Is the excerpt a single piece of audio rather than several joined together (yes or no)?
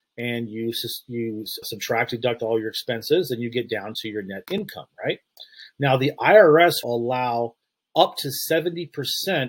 no